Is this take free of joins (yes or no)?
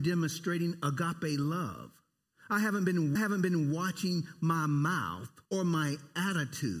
no